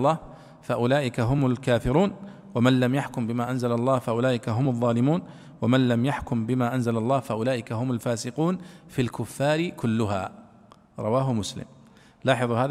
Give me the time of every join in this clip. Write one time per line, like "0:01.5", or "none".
none